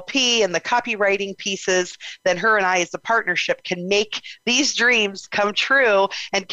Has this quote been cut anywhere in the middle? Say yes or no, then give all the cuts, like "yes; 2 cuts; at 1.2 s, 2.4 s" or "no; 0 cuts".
no; 0 cuts